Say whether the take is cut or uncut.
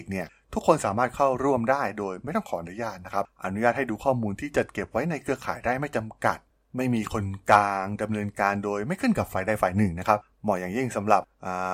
uncut